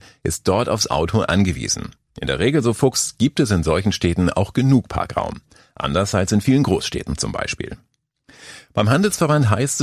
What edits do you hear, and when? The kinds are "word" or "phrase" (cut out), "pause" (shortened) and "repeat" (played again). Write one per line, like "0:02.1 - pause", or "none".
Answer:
none